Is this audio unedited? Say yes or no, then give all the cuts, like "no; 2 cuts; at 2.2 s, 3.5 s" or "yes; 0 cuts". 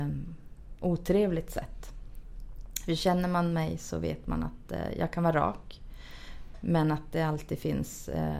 yes; 0 cuts